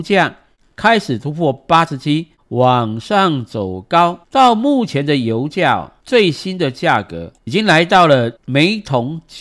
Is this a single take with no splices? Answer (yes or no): no